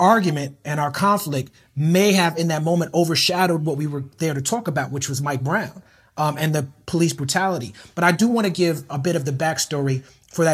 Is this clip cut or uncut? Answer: uncut